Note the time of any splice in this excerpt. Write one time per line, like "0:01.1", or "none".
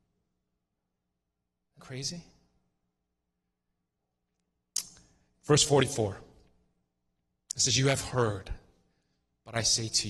0:01.8

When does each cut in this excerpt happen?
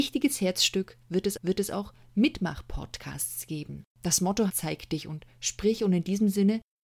0:01.4
0:03.9
0:04.5

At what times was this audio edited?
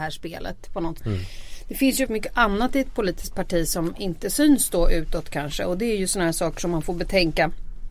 0:01.0
0:02.1

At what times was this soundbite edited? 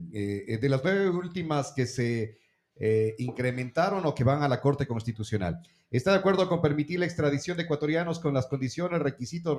none

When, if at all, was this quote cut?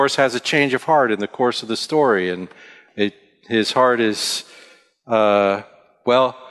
none

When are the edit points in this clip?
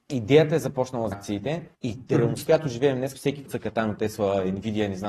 0:01.1
0:01.7
0:02.5
0:03.1
0:03.5
0:04.0

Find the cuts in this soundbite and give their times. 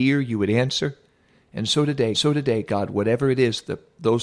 0:02.1

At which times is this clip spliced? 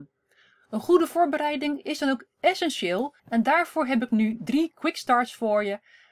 0:03.2

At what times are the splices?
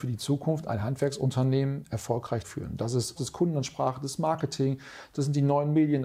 0:02.4
0:03.2

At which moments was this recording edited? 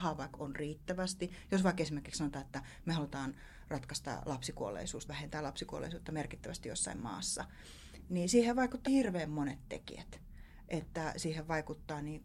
0:05.1
0:08.9

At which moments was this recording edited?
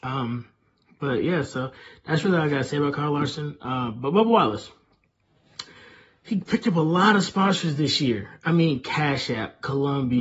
none

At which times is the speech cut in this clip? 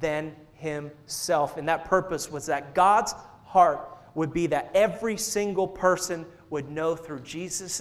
none

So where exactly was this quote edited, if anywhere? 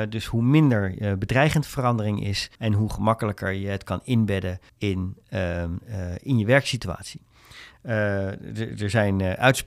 0:02.5
0:04.7

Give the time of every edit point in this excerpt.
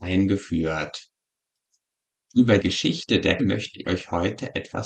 0:02.6
0:03.4
0:03.8

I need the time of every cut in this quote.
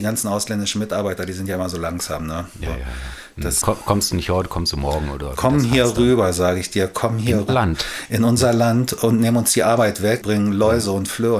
0:02.7
0:03.6
0:07.5
0:10.2

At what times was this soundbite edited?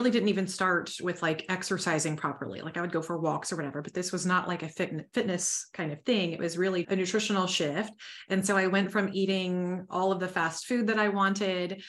0:06.8

